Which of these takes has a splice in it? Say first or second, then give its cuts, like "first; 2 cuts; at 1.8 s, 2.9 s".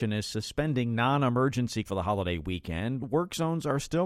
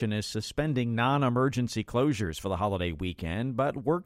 first; 2 cuts; at 1.9 s, 3.0 s